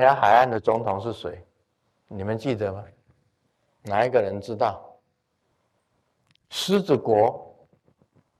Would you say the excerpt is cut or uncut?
uncut